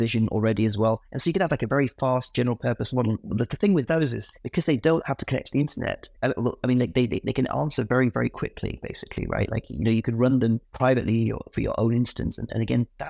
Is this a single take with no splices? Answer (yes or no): no